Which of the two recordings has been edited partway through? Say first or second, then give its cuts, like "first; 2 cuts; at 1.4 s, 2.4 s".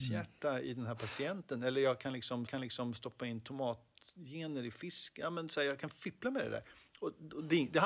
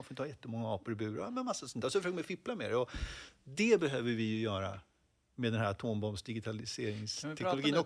first; 1 cut; at 2.5 s